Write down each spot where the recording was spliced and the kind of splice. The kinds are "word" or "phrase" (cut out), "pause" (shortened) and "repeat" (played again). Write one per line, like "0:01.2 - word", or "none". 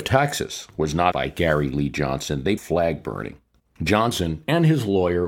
0:01.1 - word
0:02.6 - phrase